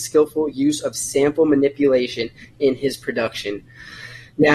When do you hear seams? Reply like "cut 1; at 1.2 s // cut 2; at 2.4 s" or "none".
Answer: none

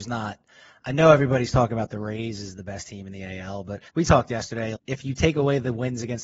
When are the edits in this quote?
cut 1; at 3.9 s // cut 2; at 4.8 s

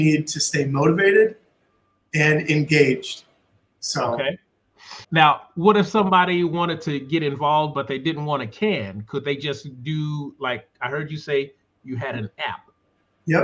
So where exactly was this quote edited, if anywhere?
cut 1; at 5.0 s

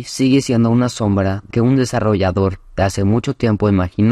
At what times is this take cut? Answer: cut 1; at 1.5 s

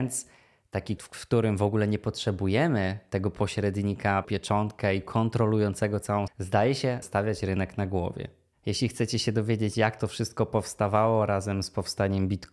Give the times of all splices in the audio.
cut 1; at 1.0 s // cut 2; at 4.2 s // cut 3; at 6.3 s // cut 4; at 7.0 s

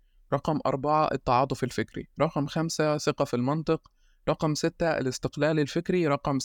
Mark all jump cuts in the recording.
none

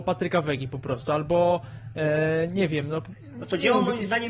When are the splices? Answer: none

